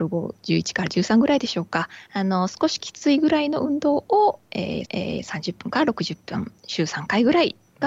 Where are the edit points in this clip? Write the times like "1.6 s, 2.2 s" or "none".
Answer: 4.8 s, 6.6 s